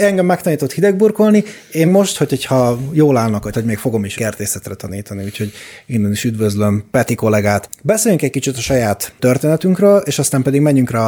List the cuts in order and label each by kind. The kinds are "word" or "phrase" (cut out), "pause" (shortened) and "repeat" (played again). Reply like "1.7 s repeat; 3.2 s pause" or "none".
1.9 s word; 3.5 s phrase; 4.2 s word

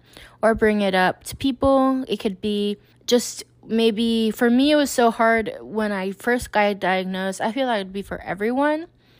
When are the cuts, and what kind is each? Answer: 2.9 s pause

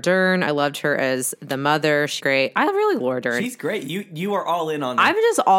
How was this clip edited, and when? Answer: 2.2 s word; 3.0 s word

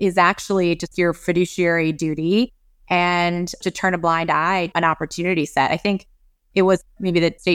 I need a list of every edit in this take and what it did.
0.9 s word; 3.6 s word; 4.7 s word

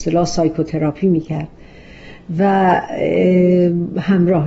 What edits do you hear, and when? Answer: none

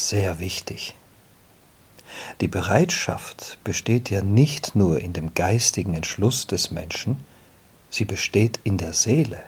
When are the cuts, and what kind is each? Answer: none

